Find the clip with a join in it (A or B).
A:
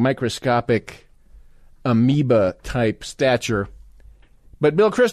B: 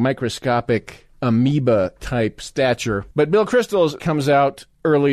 B